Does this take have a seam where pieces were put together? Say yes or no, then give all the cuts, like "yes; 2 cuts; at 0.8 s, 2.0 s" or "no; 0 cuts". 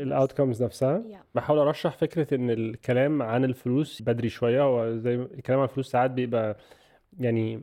yes; 1 cut; at 4.0 s